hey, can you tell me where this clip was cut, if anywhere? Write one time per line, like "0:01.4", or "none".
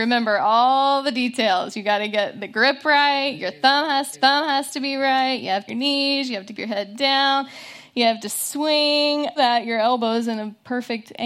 0:04.1
0:05.7
0:06.5
0:09.4